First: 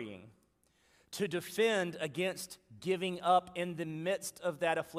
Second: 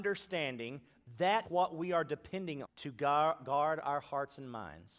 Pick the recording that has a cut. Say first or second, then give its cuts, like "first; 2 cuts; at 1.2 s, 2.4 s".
second; 2 cuts; at 1.4 s, 2.6 s